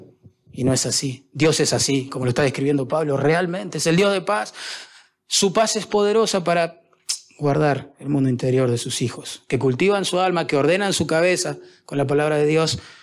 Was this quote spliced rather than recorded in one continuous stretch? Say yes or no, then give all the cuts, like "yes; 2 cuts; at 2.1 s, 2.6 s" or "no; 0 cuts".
no; 0 cuts